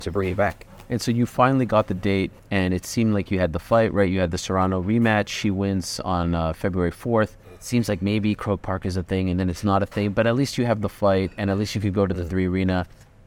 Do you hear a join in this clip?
yes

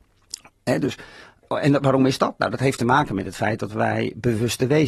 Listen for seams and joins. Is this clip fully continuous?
no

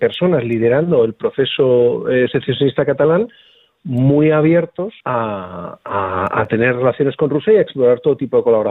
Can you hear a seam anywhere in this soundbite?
yes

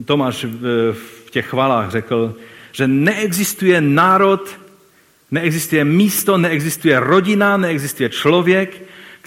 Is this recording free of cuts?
yes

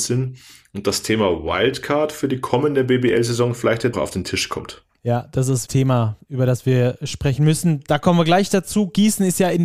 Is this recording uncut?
no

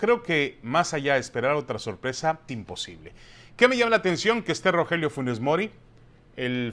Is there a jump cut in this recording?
yes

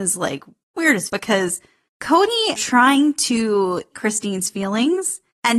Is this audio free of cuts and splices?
no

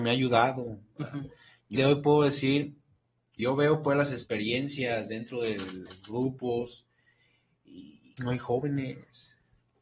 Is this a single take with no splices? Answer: no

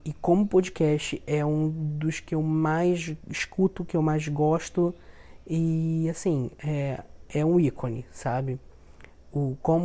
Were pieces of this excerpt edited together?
no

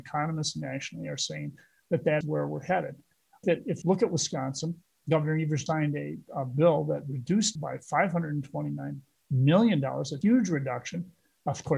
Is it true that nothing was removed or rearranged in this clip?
no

